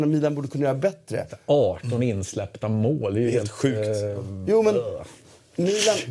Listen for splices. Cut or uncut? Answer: uncut